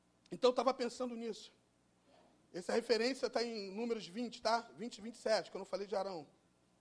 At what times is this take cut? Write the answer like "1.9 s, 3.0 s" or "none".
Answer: none